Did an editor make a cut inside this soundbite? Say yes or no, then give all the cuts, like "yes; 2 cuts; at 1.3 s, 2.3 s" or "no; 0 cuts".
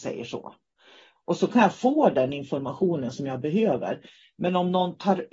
no; 0 cuts